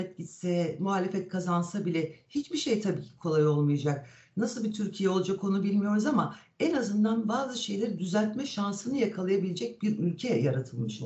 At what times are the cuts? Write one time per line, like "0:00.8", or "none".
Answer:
none